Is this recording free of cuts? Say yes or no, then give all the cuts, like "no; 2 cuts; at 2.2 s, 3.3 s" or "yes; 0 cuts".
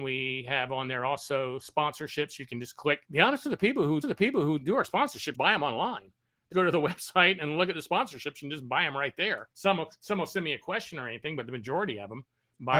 no; 6 cuts; at 3.0 s, 3.4 s, 4.0 s, 5.3 s, 6.5 s, 9.5 s